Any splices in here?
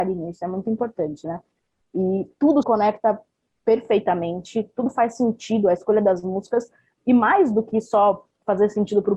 yes; 1 cut; at 2.6 s

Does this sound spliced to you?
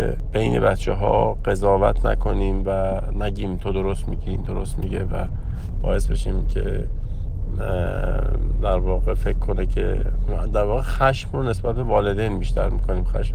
no; 0 cuts

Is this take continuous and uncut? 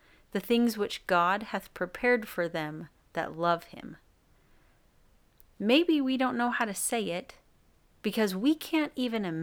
yes; 0 cuts

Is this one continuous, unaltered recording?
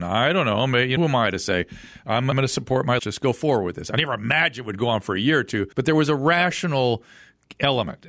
no; 4 cuts; at 1.0 s, 2.3 s, 3.0 s, 5.7 s

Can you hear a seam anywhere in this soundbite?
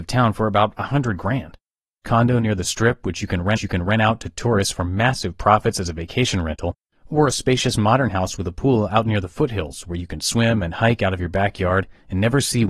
yes; 2 cuts; at 2.0 s, 3.6 s

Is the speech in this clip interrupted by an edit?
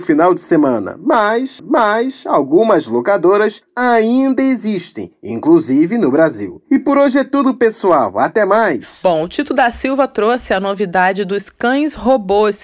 yes; 1 cut; at 1.6 s

